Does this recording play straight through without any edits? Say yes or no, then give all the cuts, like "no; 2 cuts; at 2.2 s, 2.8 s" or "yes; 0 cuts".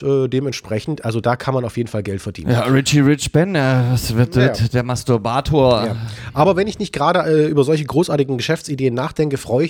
yes; 0 cuts